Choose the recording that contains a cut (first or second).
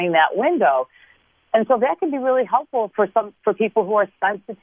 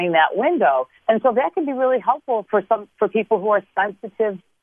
second